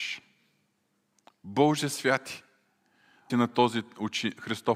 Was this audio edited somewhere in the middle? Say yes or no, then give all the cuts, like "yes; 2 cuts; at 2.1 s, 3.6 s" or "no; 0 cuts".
yes; 1 cut; at 3.3 s